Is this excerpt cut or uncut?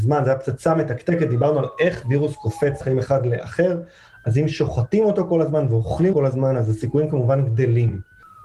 cut